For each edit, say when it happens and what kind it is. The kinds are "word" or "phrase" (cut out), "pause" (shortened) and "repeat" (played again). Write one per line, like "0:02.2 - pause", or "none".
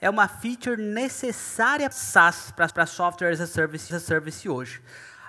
0:01.9 - word
0:02.7 - repeat
0:03.9 - repeat